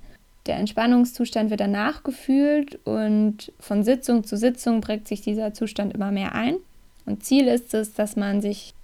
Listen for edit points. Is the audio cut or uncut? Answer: uncut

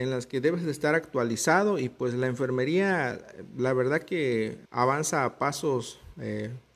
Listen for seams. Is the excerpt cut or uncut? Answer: cut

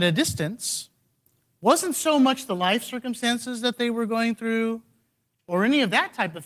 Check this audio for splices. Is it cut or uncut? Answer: uncut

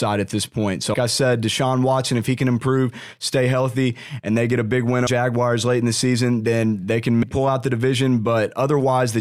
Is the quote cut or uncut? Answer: cut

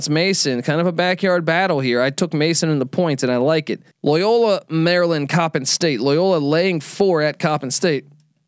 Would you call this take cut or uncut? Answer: cut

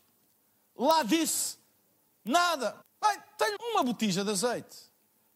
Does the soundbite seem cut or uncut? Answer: cut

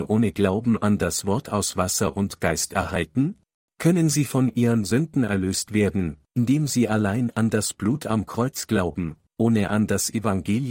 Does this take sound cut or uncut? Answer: cut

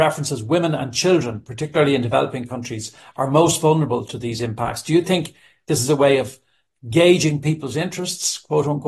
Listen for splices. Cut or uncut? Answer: uncut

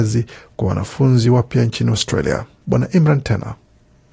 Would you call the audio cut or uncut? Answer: uncut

